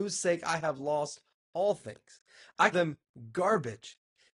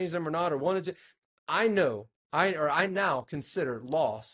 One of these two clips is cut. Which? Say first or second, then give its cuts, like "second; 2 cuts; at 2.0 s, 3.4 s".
first; 1 cut; at 2.7 s